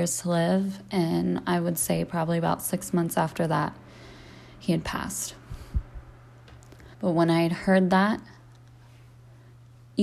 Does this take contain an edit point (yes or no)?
yes